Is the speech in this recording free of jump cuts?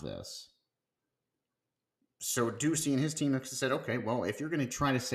yes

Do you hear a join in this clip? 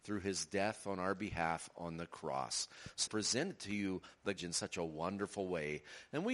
yes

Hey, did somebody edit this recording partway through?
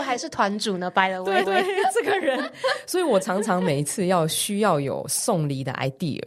yes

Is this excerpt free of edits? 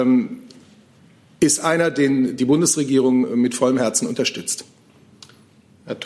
yes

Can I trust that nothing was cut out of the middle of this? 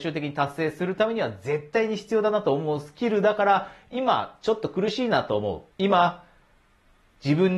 no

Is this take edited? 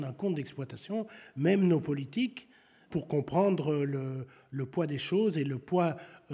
no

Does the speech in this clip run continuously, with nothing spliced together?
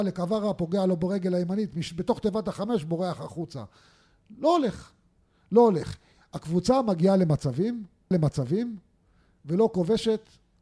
no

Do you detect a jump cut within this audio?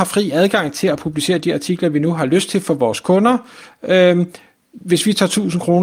no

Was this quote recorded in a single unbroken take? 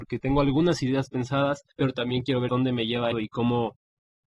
no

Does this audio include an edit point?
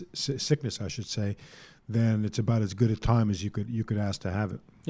no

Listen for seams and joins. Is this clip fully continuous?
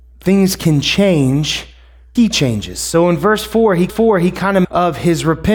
no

